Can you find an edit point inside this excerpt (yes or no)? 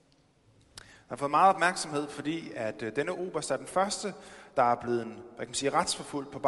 no